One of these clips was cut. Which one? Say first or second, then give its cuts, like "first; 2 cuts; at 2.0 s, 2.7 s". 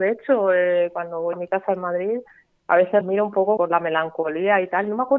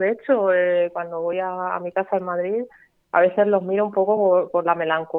first; 3 cuts; at 1.3 s, 3.0 s, 3.6 s